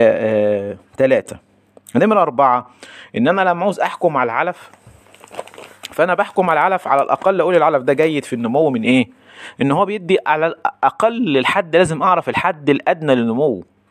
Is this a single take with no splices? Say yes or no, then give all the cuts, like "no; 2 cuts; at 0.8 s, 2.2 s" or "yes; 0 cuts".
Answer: yes; 0 cuts